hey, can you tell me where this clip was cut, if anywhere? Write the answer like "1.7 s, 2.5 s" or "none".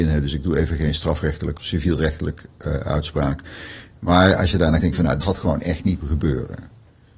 1.6 s, 4.8 s, 5.2 s, 6.0 s